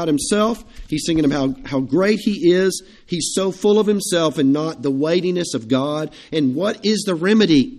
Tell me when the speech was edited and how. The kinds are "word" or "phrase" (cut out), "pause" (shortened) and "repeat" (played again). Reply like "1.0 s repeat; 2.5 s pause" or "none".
none